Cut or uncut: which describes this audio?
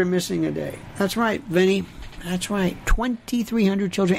uncut